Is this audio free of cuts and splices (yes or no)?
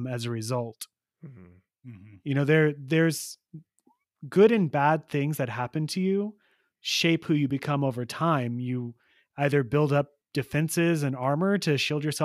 yes